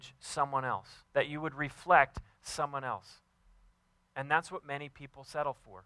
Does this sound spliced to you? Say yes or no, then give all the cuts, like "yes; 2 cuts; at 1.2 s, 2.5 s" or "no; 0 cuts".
yes; 2 cuts; at 1.0 s, 3.7 s